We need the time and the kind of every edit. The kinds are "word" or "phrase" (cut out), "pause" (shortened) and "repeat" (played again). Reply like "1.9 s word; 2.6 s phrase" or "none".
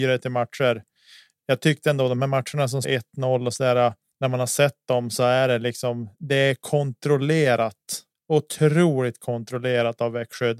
2.8 s word; 4.1 s pause; 8.1 s pause